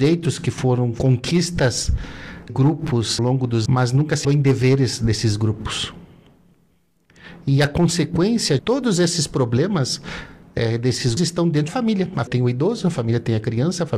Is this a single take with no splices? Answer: no; 8 cuts; at 2.5 s, 3.2 s, 3.7 s, 4.2 s, 8.6 s, 11.2 s, 11.7 s, 12.3 s

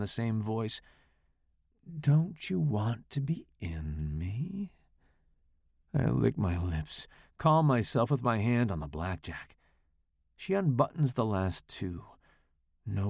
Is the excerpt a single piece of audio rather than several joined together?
yes; 0 cuts

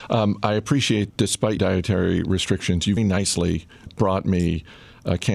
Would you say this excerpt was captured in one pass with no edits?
no; 4 cuts; at 1.1 s, 1.6 s, 3.0 s, 3.9 s

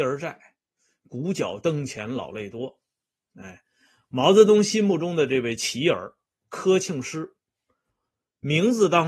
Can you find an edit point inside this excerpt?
no; 0 cuts

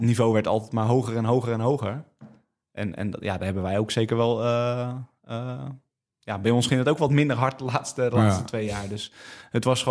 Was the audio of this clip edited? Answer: no; 0 cuts

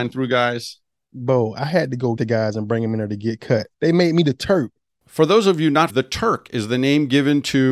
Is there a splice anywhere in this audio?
yes; 3 cuts; at 2.2 s, 3.7 s, 5.9 s

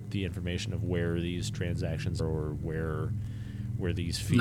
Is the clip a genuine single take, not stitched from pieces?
no; 1 cut; at 2.2 s

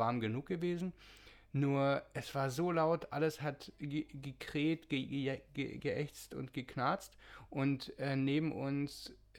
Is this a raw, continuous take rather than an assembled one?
yes; 0 cuts

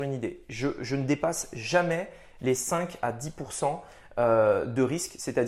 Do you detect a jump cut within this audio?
no; 0 cuts

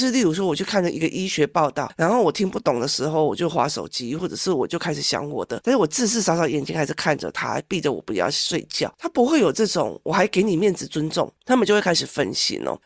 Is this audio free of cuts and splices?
no; 1 cut; at 11.4 s

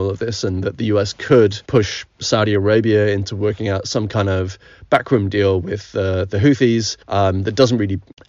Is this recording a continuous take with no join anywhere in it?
no; 2 cuts; at 1.6 s, 7.0 s

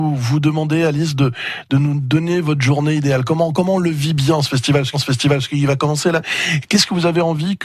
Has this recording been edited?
yes; 1 cut; at 4.9 s

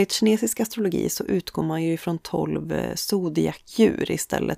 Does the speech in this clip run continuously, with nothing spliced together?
yes; 0 cuts

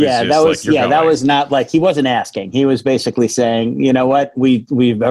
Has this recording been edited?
no; 0 cuts

